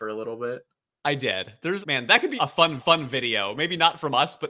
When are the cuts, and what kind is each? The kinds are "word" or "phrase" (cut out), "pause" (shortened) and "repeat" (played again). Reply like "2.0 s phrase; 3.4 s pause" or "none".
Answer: 1.8 s word; 2.4 s word; 2.8 s repeat